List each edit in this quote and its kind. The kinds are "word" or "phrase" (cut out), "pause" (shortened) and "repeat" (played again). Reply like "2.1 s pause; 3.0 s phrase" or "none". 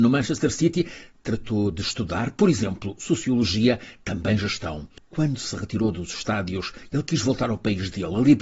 none